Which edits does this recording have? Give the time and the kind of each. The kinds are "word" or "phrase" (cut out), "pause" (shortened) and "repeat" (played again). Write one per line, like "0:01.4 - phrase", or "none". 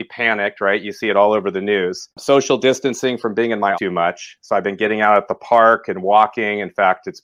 0:02.1 - pause
0:03.7 - word